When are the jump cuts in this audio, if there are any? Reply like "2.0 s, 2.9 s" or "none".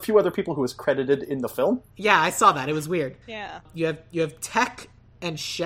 1.9 s, 3.2 s